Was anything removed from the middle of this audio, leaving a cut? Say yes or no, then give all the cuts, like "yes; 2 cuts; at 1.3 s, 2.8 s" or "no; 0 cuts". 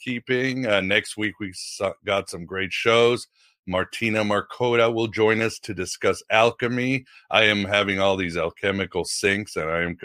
no; 0 cuts